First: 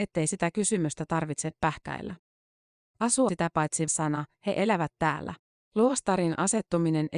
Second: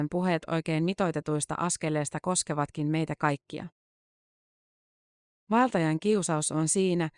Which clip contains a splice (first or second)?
first